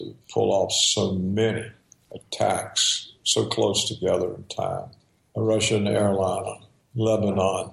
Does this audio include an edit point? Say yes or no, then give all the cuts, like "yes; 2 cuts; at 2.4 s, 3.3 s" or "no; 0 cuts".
no; 0 cuts